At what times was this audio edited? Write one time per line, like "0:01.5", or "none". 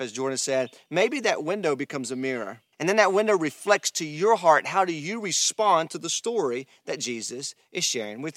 0:02.7